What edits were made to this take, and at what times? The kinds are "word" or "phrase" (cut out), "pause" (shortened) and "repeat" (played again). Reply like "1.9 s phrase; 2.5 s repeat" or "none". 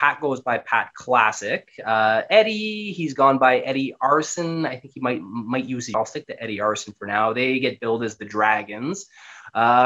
5.9 s phrase